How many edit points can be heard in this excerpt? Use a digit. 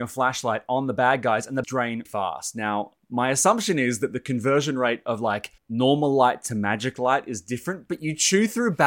3